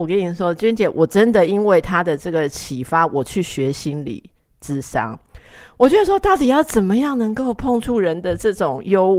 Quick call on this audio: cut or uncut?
uncut